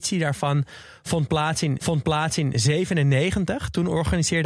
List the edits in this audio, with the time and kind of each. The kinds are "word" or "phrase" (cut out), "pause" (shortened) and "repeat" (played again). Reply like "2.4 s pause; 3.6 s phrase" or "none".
1.8 s repeat